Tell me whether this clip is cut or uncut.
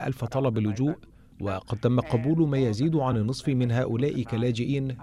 uncut